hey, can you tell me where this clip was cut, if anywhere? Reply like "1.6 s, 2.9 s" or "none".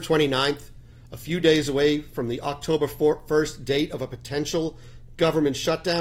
none